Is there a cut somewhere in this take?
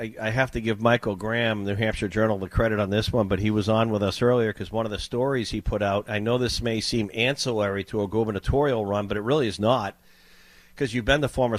no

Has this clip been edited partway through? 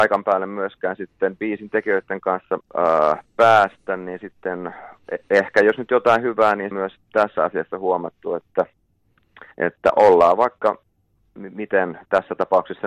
yes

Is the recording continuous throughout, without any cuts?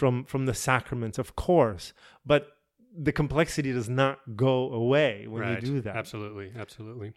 yes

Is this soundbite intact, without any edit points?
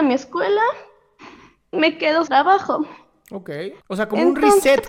no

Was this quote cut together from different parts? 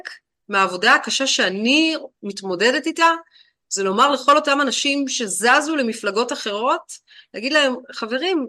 no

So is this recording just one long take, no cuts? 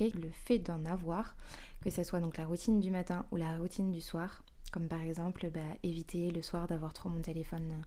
yes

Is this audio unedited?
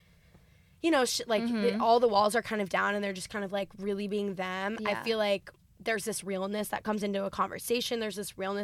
yes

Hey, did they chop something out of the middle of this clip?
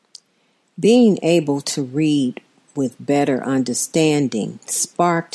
no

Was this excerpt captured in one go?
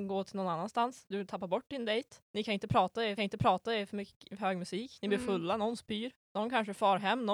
no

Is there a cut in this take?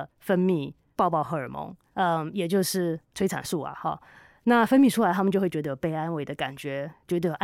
no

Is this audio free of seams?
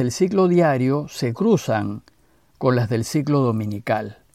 yes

